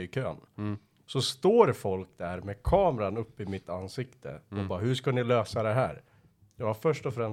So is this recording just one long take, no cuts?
yes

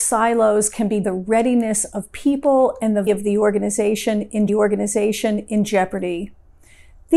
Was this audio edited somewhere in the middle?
yes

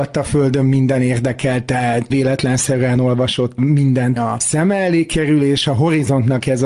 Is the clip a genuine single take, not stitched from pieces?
no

